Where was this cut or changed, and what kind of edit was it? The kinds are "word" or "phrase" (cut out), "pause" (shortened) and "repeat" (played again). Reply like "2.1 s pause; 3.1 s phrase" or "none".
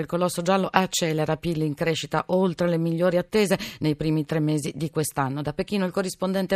none

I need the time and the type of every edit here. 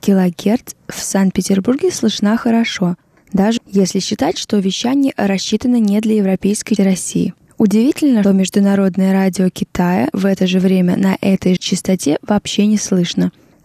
3.6 s word; 6.8 s word; 8.2 s word; 10.1 s word; 11.6 s word

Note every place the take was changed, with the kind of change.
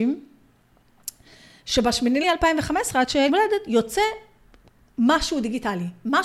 2.2 s word; 3.3 s word

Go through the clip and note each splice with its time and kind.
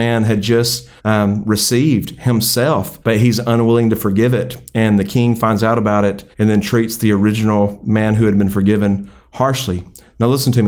1.0 s pause; 3.0 s pause; 6.3 s pause

